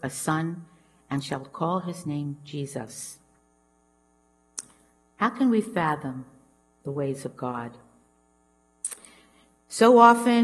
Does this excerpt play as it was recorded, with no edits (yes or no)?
yes